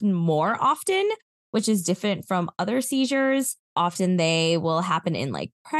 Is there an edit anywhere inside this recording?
no; 0 cuts

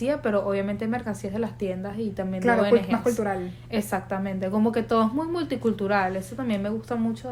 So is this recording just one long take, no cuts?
yes; 0 cuts

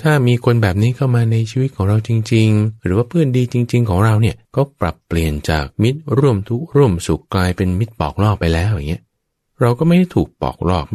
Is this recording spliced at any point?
yes; 4 cuts; at 2.8 s, 4.4 s, 5.7 s, 9.3 s

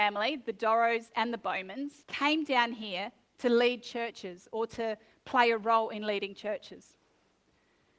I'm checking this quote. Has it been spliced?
yes; 1 cut; at 2.0 s

